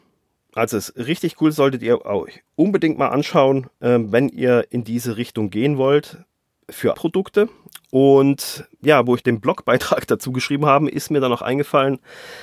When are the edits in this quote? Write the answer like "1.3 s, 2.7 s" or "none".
2.5 s, 6.9 s, 9.2 s